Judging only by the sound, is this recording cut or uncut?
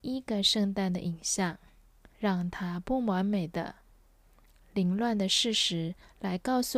cut